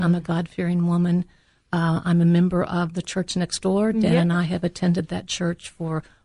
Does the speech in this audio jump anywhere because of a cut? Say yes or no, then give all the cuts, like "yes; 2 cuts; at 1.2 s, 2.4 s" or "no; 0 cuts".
no; 0 cuts